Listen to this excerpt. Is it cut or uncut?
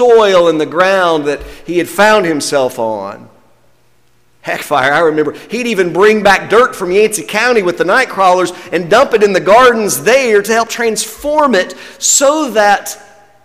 uncut